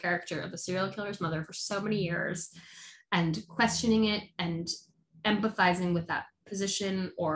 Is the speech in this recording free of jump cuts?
yes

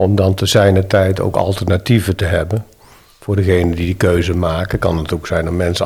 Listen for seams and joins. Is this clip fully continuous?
yes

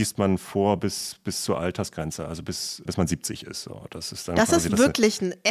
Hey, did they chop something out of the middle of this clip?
no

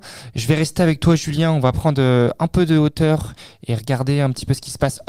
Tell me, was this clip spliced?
no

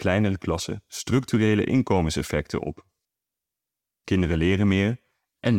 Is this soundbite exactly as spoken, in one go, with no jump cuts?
yes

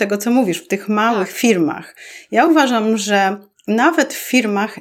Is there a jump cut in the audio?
no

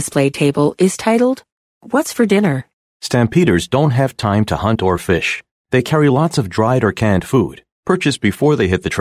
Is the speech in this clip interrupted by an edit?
no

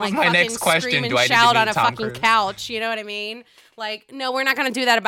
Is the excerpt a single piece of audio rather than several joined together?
yes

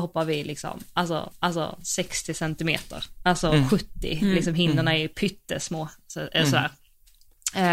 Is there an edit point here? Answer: yes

